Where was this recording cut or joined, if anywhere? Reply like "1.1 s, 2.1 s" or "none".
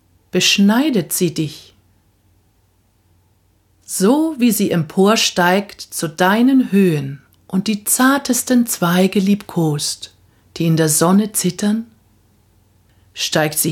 none